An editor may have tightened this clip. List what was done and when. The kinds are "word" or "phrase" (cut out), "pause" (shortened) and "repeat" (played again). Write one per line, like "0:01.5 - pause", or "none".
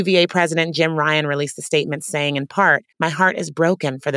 0:02.9 - pause